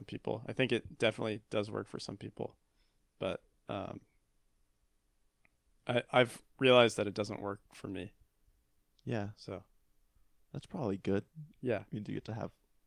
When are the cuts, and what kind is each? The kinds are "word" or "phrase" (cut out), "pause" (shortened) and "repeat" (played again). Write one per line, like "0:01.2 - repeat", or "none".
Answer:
none